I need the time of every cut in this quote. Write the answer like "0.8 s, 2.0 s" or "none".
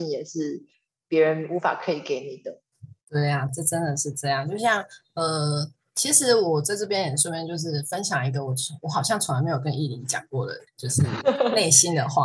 3.0 s, 3.5 s, 10.7 s